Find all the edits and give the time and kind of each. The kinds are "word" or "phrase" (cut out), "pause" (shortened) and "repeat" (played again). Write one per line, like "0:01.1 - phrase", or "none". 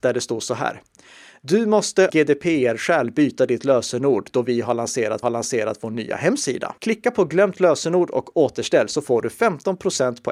0:02.1 - word
0:05.2 - repeat
0:06.8 - pause